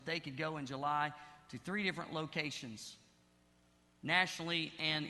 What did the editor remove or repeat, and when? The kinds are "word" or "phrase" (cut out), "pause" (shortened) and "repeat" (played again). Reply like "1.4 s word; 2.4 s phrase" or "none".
none